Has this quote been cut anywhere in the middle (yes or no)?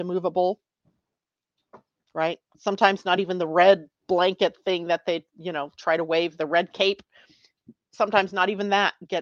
no